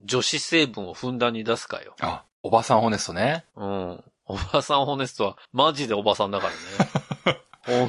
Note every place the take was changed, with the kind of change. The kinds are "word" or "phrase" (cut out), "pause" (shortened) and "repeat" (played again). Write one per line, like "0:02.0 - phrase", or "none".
0:02.3 - pause
0:05.4 - pause